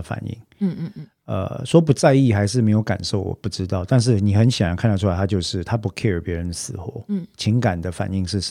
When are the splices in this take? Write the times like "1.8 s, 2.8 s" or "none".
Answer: none